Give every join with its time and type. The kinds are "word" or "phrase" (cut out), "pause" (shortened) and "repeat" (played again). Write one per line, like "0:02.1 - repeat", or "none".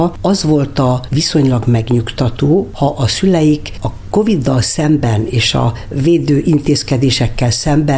none